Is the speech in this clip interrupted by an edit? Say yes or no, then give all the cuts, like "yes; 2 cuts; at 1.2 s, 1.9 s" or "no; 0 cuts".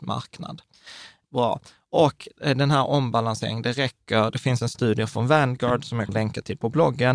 yes; 1 cut; at 6.1 s